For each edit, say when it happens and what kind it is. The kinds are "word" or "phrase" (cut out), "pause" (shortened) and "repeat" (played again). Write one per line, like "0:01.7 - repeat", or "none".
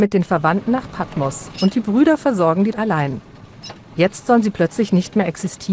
0:02.7 - word